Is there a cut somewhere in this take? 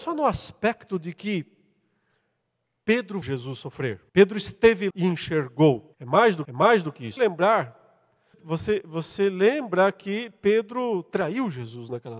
yes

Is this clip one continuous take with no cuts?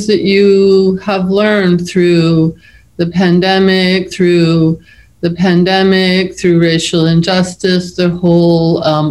no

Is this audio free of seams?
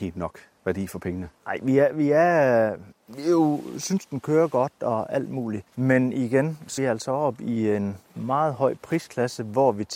no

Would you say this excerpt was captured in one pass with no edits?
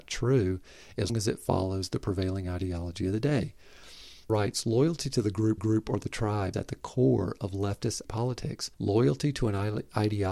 no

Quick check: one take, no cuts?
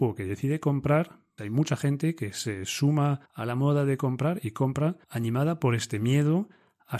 no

